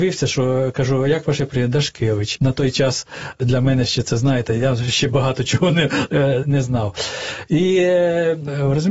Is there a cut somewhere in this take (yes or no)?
yes